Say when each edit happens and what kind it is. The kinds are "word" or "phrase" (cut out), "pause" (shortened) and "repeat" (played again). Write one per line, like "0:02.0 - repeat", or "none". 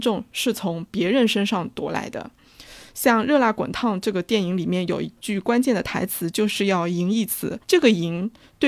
0:07.6 - pause